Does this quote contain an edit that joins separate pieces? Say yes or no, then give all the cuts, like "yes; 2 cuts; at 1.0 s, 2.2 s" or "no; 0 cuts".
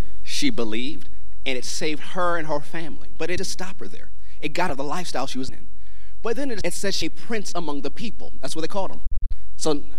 yes; 5 cuts; at 3.4 s, 4.7 s, 5.5 s, 6.6 s, 7.0 s